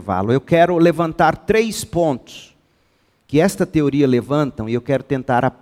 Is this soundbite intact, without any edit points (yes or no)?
yes